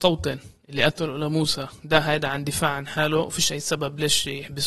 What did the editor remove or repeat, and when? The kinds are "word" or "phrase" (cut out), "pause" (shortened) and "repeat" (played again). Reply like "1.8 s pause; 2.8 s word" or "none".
none